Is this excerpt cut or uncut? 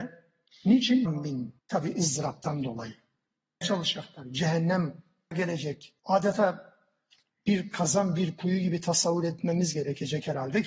cut